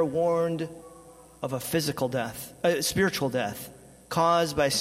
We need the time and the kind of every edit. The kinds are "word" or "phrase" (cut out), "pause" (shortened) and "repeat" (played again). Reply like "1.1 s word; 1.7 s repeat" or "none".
none